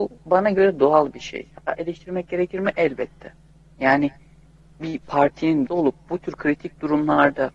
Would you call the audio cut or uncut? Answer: cut